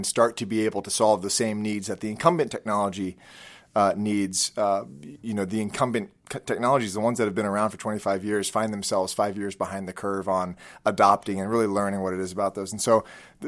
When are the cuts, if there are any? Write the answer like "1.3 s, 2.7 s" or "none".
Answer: 6.2 s